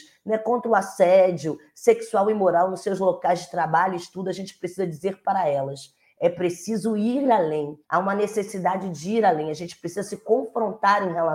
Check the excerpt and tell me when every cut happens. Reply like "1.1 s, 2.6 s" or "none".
7.8 s